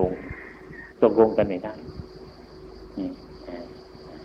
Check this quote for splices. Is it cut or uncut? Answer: cut